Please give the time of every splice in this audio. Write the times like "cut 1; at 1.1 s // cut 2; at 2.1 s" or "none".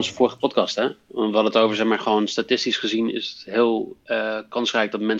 none